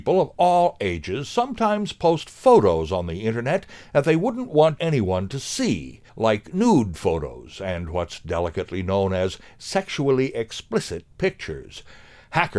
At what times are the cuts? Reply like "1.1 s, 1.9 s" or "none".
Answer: 4.8 s, 6.1 s